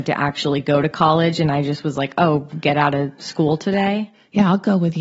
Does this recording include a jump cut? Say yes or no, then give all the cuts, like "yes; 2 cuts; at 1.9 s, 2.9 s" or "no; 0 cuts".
no; 0 cuts